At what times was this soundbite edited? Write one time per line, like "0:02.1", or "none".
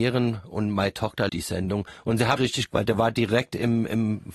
0:01.3
0:02.4
0:02.7